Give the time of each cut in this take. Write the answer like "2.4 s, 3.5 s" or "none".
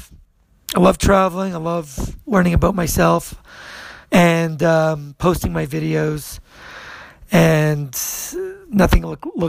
4.0 s